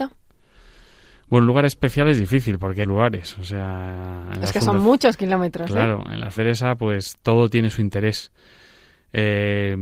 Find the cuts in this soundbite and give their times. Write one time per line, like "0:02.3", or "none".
0:02.8
0:06.4